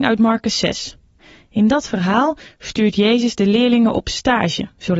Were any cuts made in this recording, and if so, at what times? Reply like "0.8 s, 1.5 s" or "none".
1.2 s